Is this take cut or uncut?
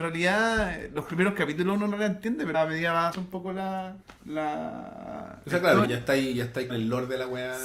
cut